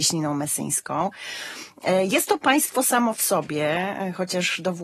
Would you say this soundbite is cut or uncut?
uncut